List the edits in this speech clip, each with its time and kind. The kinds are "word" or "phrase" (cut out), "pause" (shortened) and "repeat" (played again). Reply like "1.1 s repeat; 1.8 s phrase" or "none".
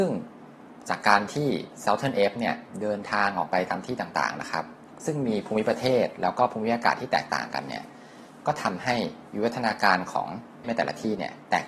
10.6 s word